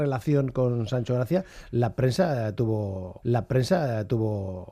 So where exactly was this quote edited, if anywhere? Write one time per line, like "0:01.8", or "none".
0:03.2

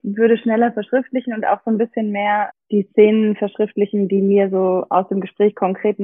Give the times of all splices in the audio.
0:02.5

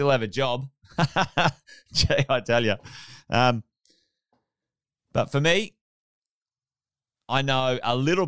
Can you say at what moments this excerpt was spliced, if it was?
none

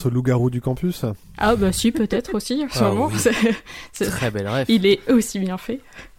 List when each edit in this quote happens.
none

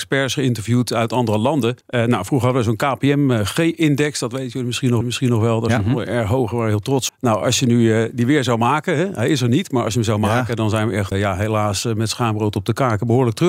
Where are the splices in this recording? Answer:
0:01.8
0:05.0
0:07.1
0:11.1

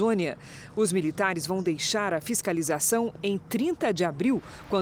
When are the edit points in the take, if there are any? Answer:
none

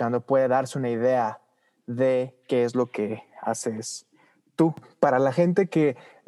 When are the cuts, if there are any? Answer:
none

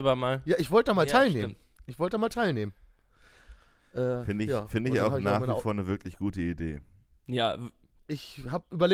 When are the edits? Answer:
none

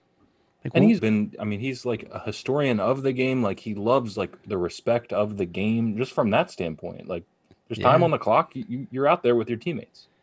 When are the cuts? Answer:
0:01.0

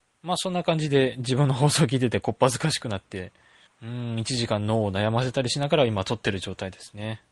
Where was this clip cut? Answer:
0:03.7

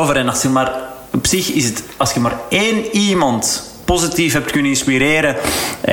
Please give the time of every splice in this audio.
none

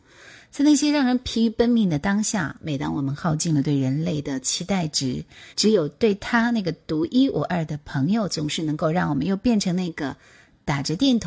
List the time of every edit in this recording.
0:05.5

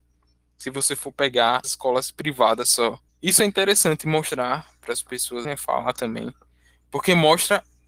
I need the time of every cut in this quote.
0:01.6
0:03.1
0:05.4

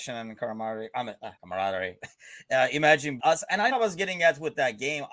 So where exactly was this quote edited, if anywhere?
0:01.4
0:03.2
0:03.7

